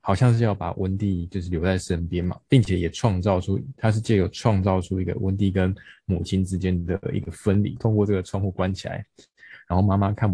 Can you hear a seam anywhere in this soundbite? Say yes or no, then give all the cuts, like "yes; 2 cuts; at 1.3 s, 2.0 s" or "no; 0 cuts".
yes; 1 cut; at 7.8 s